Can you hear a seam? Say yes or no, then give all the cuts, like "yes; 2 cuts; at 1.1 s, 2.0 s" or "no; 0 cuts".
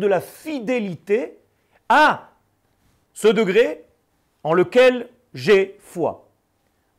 no; 0 cuts